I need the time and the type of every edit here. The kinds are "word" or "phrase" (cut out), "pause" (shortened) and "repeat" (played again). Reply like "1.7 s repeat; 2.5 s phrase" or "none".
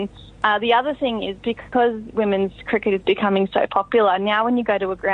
none